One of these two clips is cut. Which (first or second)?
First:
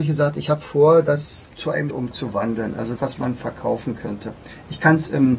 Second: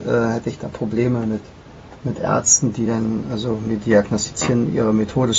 first